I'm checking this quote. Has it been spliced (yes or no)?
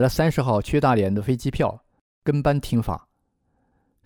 no